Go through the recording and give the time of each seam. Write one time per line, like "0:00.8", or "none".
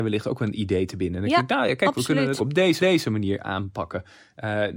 0:02.4
0:02.8